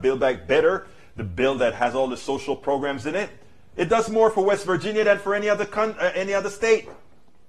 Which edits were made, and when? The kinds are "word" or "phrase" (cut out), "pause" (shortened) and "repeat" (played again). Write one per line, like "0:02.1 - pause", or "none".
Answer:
none